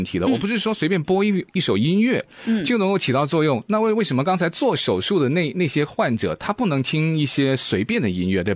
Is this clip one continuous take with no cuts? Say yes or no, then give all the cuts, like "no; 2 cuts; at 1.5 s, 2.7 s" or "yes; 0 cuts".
yes; 0 cuts